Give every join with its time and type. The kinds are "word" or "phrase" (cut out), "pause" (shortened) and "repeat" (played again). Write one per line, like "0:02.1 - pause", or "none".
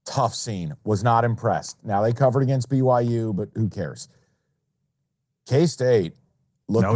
none